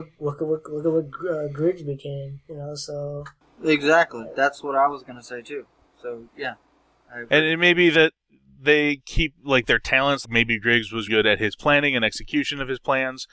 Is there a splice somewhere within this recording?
yes; 3 cuts; at 6.3 s, 10.2 s, 11.1 s

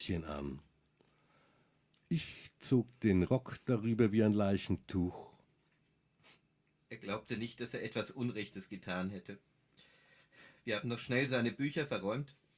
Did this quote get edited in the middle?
no; 0 cuts

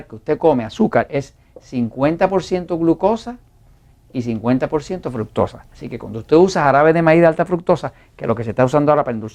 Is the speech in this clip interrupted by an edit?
no; 0 cuts

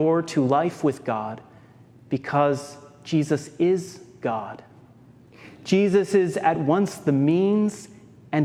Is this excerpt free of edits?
yes; 0 cuts

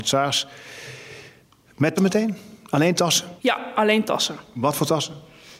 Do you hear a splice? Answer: yes; 1 cut; at 2.0 s

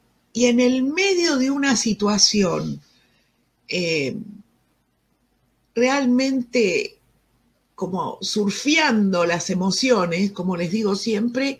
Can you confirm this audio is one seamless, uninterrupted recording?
yes; 0 cuts

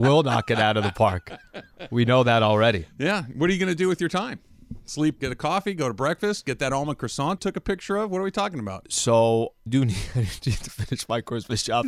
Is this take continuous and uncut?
no; 3 cuts; at 5.2 s, 7.4 s, 9.7 s

